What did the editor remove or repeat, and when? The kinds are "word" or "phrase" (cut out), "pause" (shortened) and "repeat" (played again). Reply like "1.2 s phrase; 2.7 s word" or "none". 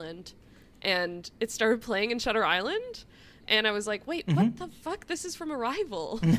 none